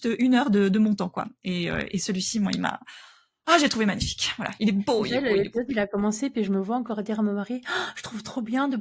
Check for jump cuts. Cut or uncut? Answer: uncut